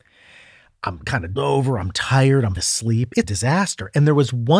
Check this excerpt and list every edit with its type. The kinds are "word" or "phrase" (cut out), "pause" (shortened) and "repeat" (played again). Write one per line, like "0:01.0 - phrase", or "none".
0:01.4 - word
0:02.6 - word
0:03.2 - word